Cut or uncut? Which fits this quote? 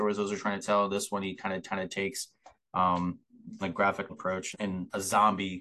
cut